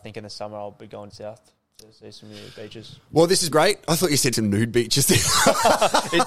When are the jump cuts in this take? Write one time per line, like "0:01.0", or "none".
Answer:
0:01.1
0:03.5
0:04.3